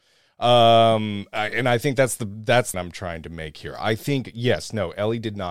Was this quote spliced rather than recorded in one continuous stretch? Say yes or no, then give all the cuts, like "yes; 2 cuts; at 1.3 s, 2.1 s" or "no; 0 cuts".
yes; 1 cut; at 2.7 s